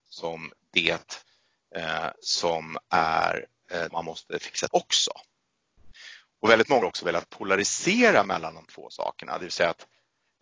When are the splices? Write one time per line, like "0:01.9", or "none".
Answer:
0:03.9
0:04.7
0:06.8
0:08.6

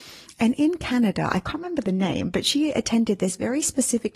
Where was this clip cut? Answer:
none

